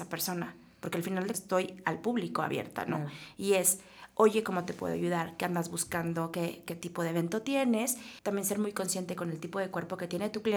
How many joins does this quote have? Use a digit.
2